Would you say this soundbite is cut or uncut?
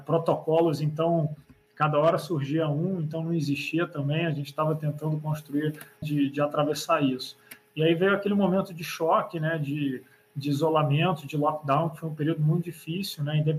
cut